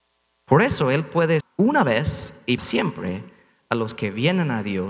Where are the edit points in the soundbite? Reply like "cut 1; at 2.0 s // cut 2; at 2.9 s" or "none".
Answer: cut 1; at 1.4 s // cut 2; at 2.6 s